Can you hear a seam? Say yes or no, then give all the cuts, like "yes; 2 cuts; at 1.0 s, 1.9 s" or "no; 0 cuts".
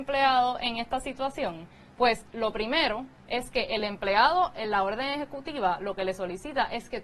no; 0 cuts